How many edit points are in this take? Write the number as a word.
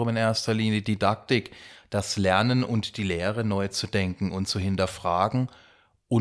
zero